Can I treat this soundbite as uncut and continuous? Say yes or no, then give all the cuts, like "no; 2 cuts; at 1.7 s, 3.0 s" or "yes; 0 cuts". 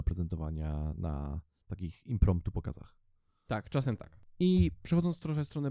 yes; 0 cuts